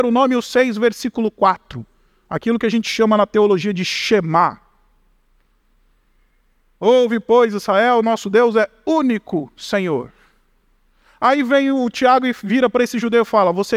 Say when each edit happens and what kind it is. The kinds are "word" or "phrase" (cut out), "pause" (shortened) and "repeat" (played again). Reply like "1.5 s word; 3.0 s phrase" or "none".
none